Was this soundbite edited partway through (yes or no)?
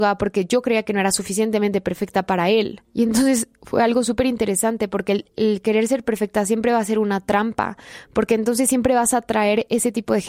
yes